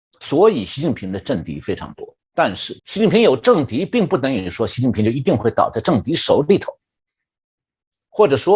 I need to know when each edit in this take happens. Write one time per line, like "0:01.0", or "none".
0:02.2
0:02.8